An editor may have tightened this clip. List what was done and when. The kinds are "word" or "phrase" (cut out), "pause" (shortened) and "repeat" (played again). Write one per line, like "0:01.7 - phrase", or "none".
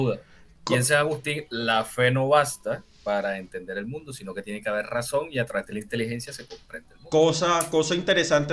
0:02.9 - pause